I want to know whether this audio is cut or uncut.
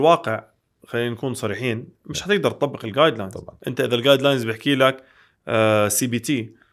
uncut